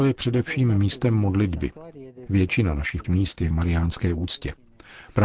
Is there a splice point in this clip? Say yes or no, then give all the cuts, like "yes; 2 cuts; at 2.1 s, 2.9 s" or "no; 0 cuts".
yes; 2 cuts; at 3.0 s, 3.5 s